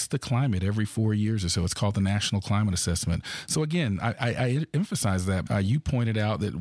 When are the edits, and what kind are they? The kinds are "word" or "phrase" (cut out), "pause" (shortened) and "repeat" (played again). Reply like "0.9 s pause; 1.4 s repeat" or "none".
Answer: 5.4 s word